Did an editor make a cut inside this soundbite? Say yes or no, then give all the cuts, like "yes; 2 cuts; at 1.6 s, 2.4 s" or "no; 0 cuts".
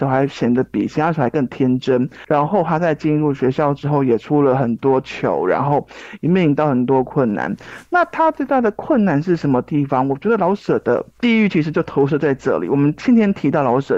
no; 0 cuts